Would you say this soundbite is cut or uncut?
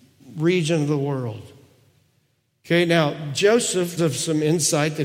cut